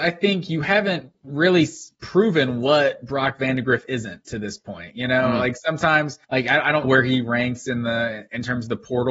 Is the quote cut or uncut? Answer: cut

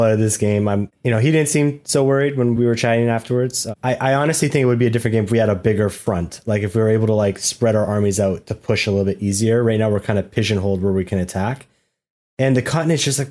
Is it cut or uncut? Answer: uncut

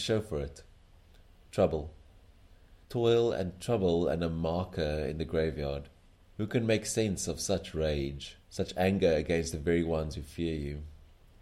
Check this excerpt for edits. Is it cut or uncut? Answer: cut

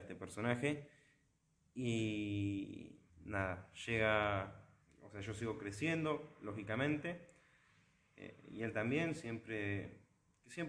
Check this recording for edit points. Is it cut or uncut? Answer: cut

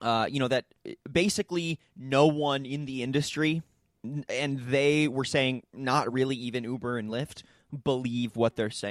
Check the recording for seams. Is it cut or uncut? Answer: uncut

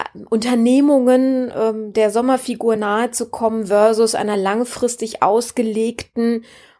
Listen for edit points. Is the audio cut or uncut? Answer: uncut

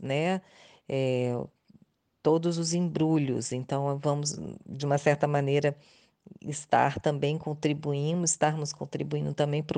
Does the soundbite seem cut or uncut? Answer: uncut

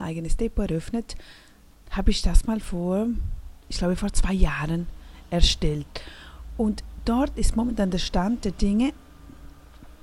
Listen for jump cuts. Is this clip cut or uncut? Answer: uncut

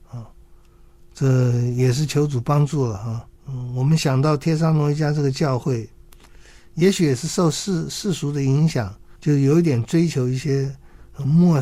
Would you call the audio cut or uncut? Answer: cut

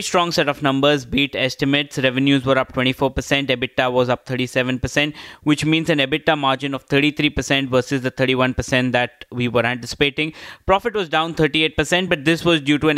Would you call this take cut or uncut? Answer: uncut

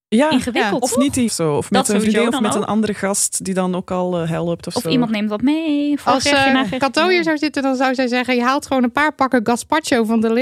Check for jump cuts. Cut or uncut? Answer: cut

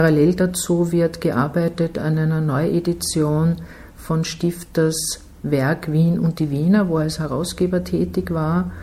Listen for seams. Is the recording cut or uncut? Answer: uncut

